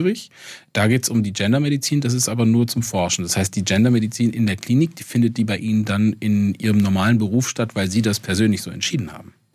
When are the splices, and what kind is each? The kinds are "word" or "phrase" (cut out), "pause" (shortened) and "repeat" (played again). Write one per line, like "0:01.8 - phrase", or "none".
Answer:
none